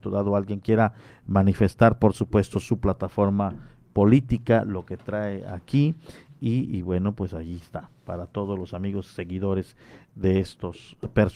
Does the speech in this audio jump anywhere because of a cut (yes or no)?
no